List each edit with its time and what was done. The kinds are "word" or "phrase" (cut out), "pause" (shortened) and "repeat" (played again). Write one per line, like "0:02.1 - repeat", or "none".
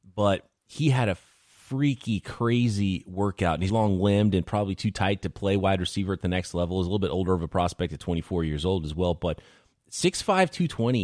0:03.7 - word